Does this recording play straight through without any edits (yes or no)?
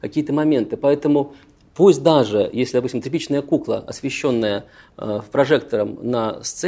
yes